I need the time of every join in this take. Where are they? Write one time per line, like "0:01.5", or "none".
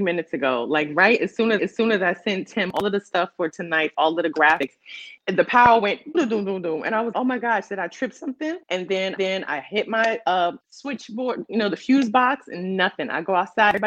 0:01.6
0:03.9
0:05.2
0:06.1
0:07.1
0:08.6
0:09.2
0:10.6